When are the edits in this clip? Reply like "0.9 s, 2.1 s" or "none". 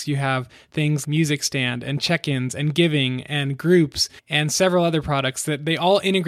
1.0 s, 4.2 s